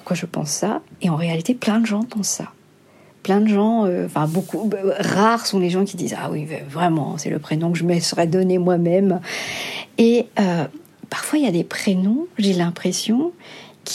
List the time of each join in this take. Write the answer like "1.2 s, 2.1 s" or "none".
none